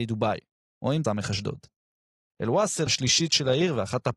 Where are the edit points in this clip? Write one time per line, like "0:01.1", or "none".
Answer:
0:01.0
0:02.9